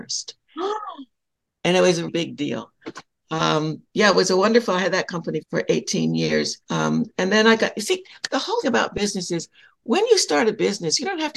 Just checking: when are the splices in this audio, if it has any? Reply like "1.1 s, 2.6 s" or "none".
2.1 s, 5.4 s, 6.6 s, 8.6 s